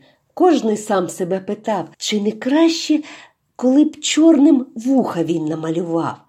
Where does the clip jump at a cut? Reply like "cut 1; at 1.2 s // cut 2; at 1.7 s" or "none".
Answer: cut 1; at 1.9 s